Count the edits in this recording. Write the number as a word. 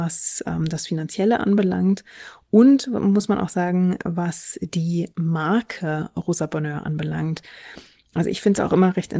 zero